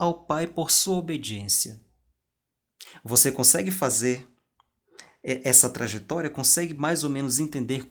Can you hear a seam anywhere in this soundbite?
no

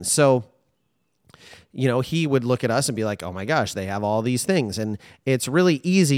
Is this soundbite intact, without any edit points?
yes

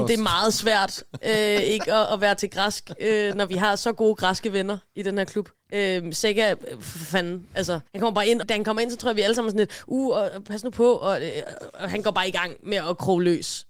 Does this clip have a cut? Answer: yes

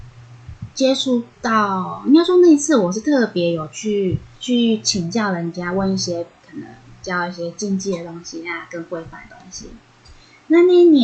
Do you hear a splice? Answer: yes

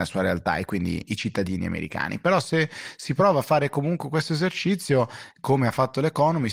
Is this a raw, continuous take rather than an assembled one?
yes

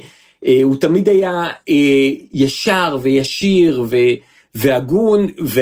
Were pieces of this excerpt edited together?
no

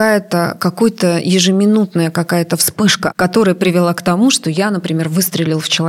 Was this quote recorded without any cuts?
no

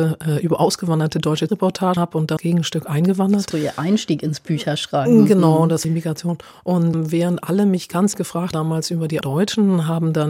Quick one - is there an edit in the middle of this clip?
yes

